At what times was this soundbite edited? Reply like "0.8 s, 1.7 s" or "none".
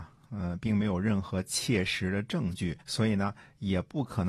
2.8 s